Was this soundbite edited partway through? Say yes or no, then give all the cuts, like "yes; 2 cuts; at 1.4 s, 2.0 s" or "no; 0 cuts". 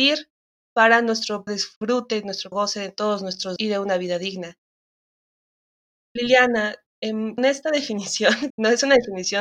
yes; 5 cuts; at 1.5 s, 2.5 s, 3.6 s, 7.4 s, 8.5 s